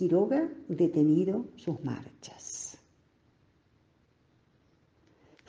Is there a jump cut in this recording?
no; 0 cuts

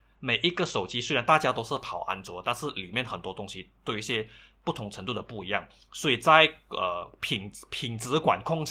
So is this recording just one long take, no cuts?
yes; 0 cuts

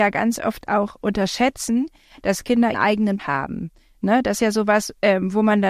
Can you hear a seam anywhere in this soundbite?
yes; 3 cuts; at 2.7 s, 3.2 s, 4.4 s

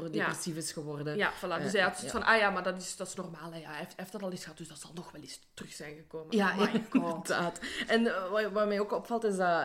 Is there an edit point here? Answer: no; 0 cuts

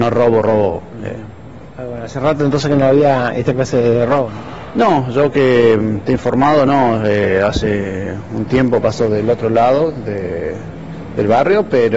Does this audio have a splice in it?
no; 0 cuts

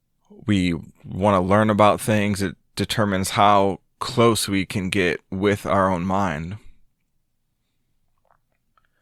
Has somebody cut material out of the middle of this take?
no; 0 cuts

